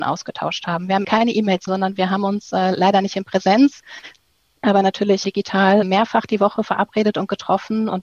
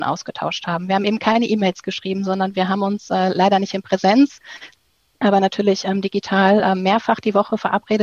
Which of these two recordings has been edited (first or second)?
first